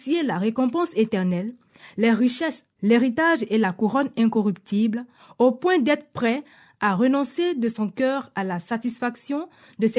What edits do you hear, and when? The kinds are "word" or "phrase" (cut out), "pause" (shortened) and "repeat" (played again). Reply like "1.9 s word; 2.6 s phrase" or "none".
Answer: 2.7 s word

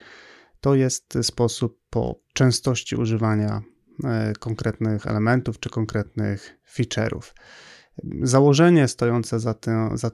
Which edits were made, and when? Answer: 2.2 s pause; 6.6 s pause

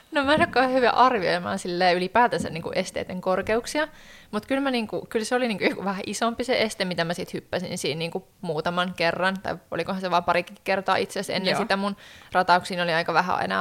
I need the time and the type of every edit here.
8.3 s pause

